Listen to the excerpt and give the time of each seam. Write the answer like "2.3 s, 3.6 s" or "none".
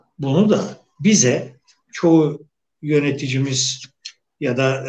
none